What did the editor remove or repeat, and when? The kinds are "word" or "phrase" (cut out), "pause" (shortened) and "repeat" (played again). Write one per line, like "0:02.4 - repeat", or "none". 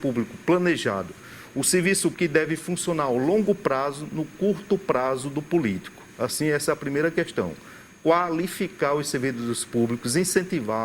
0:02.1 - word